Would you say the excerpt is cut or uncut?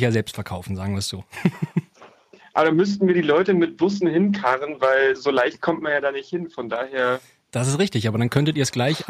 uncut